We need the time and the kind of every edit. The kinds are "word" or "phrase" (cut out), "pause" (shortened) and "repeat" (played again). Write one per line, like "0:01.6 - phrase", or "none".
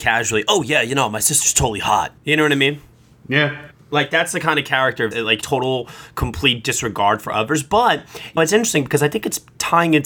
0:02.2 - pause
0:03.7 - pause
0:05.1 - phrase
0:05.4 - word
0:08.4 - word

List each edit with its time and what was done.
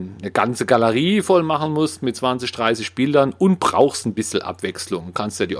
none

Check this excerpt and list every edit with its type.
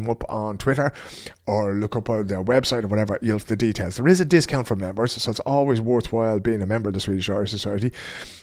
0:03.4 - word

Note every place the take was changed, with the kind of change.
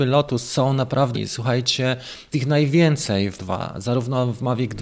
0:01.1 - word
0:02.3 - word
0:03.4 - word

